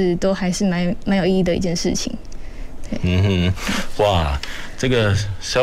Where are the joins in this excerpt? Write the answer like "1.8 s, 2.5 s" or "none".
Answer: none

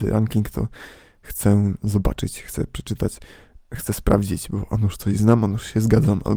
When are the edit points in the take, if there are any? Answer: none

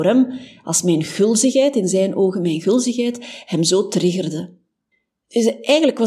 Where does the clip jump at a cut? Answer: none

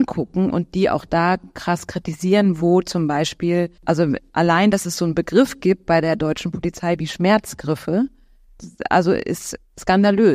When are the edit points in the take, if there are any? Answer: 3.8 s

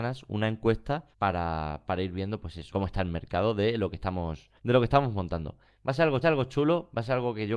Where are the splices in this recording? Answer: 1.1 s, 2.7 s, 4.6 s, 6.2 s

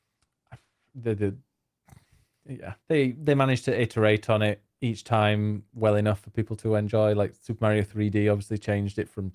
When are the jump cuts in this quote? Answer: 2.8 s

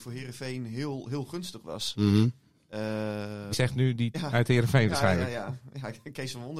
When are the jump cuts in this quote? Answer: 3.5 s, 4.1 s

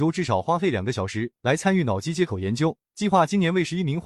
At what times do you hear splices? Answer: 1.4 s, 2.9 s

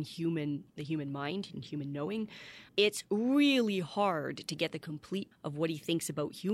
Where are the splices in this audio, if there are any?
2.7 s, 5.3 s

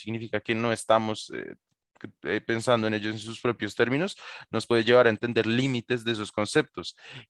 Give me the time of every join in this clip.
none

